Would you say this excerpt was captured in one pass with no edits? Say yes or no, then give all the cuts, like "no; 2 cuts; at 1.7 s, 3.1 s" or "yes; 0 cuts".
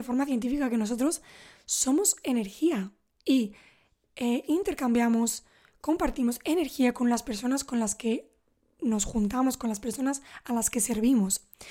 yes; 0 cuts